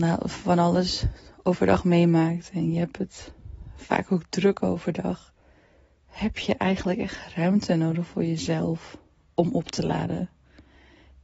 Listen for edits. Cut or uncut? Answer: uncut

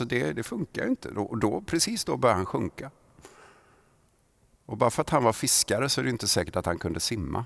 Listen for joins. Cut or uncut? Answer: uncut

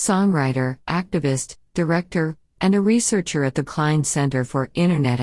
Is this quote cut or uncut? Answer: cut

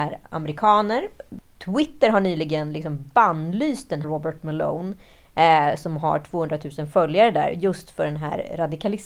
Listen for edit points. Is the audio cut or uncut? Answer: cut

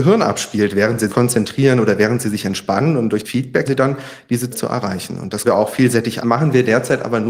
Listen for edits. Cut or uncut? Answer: cut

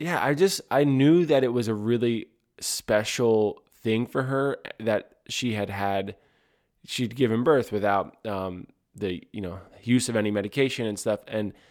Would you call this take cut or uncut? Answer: uncut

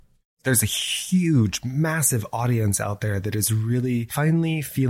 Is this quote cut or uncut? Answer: uncut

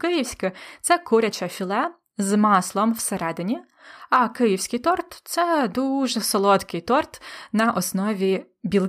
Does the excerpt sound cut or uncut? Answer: uncut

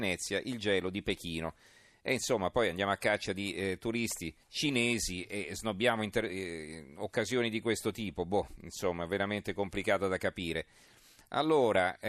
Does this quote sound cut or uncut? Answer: cut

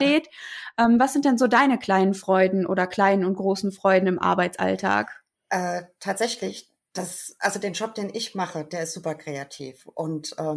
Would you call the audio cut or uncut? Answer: uncut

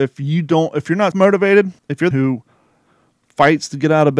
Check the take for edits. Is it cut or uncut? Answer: cut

